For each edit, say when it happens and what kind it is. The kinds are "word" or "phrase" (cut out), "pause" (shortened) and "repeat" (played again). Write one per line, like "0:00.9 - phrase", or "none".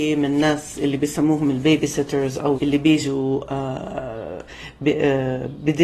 0:02.5 - word